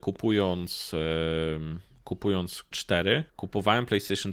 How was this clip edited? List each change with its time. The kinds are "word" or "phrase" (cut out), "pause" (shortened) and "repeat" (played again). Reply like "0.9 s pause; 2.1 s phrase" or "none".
2.7 s word; 3.3 s pause